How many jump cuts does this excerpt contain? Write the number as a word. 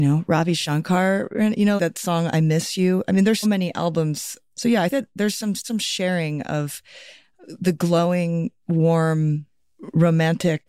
five